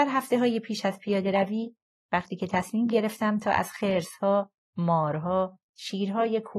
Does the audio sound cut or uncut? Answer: uncut